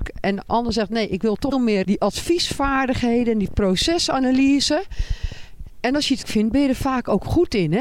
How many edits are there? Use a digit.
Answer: 3